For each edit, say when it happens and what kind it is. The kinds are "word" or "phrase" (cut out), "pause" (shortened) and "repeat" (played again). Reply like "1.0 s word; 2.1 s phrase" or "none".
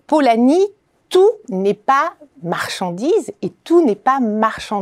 1.4 s pause